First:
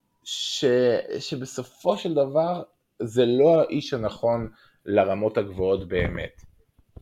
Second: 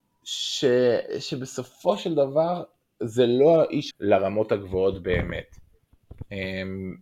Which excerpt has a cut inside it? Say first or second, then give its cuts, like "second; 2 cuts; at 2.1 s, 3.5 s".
second; 1 cut; at 3.9 s